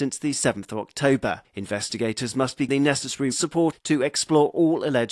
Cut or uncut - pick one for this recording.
cut